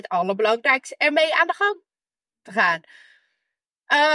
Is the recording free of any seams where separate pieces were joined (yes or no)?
yes